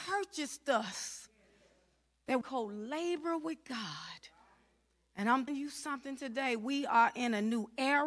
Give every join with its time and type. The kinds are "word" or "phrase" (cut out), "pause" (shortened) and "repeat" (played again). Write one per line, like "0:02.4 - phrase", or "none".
0:02.4 - phrase
0:05.5 - word